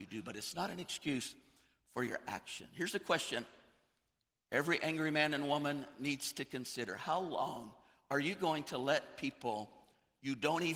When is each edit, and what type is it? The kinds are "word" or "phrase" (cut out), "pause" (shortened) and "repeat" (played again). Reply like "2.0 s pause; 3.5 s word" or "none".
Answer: none